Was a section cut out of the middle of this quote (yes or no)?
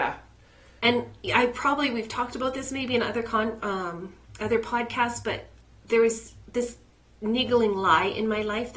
no